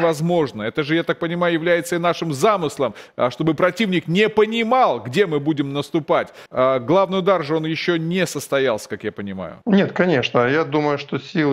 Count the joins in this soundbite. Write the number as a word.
two